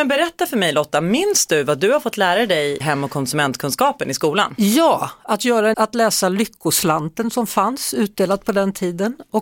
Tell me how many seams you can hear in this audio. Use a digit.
2